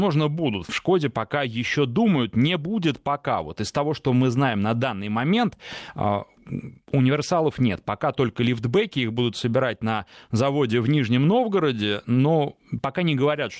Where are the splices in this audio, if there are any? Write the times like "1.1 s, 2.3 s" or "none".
none